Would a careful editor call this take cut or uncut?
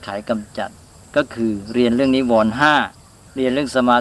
cut